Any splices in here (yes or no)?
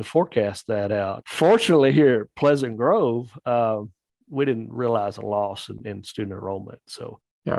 no